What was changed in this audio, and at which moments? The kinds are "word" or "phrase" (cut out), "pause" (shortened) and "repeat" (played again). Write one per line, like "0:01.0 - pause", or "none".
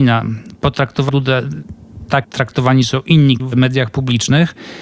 0:01.1 - word
0:02.2 - word
0:03.4 - word